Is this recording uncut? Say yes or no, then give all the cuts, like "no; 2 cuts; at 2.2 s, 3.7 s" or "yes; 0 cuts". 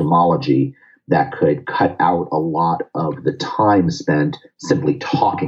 yes; 0 cuts